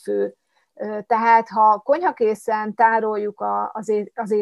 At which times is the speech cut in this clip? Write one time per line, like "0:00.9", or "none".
none